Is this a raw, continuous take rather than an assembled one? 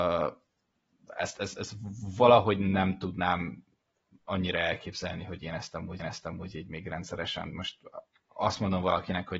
no; 1 cut; at 6.0 s

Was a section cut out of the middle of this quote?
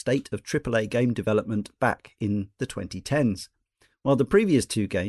no; 0 cuts

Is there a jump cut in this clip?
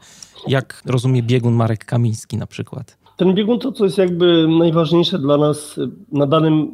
yes; 1 cut; at 3.6 s

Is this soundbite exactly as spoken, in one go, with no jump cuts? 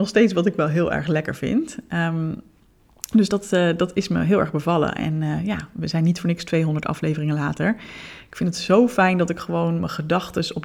yes; 0 cuts

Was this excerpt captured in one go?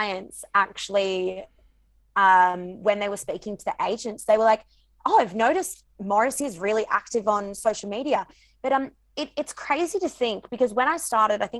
yes; 0 cuts

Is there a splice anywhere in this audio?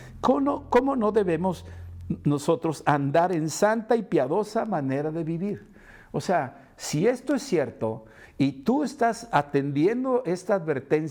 no; 0 cuts

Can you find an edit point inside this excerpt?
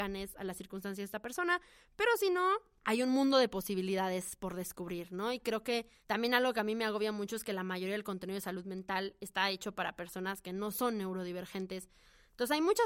no; 0 cuts

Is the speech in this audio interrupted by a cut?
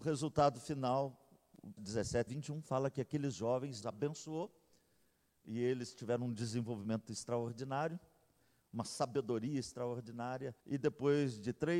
yes; 4 cuts; at 1.8 s, 2.3 s, 3.8 s, 10.6 s

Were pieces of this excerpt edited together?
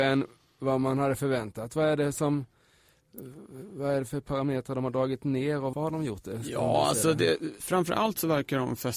yes; 2 cuts; at 5.7 s, 7.6 s

